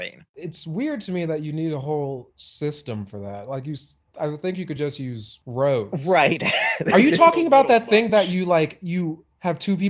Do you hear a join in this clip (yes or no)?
no